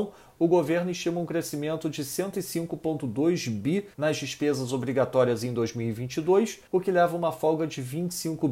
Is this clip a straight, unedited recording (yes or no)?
no